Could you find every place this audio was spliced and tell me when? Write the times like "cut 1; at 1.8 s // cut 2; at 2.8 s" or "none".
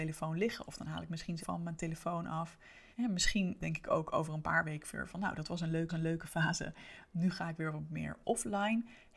cut 1; at 1.4 s // cut 2; at 2.9 s // cut 3; at 3.6 s // cut 4; at 5.9 s // cut 5; at 8.2 s